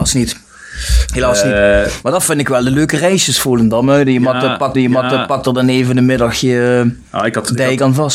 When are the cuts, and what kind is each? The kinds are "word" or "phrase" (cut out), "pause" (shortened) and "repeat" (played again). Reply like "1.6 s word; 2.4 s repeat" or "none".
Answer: 4.7 s repeat